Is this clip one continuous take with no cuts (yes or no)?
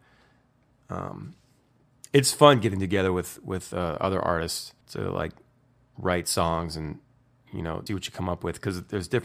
no